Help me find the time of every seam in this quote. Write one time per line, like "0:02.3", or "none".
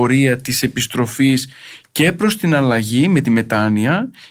none

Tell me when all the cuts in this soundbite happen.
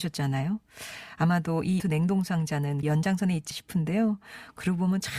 0:01.8
0:02.8
0:03.5

